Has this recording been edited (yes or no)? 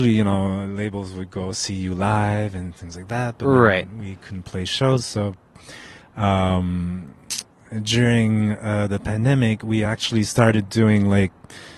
no